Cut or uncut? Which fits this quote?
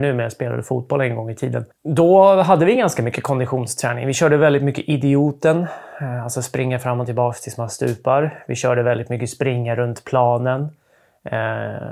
uncut